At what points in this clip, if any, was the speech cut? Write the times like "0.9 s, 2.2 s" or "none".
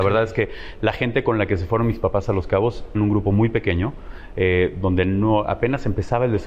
2.9 s